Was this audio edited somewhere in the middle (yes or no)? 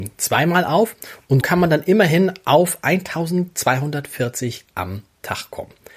yes